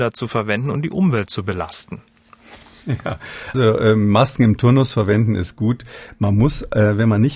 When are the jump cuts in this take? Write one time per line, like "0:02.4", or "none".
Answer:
0:03.5